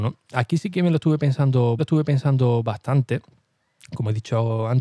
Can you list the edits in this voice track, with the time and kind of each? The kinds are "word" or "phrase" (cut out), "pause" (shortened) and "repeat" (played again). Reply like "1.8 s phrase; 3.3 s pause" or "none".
1.8 s repeat